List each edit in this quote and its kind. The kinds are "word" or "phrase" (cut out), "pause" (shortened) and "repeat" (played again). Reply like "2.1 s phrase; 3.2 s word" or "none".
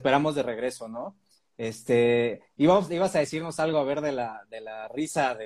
none